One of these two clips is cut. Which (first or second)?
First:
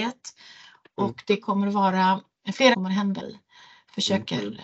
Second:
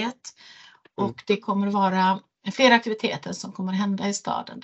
first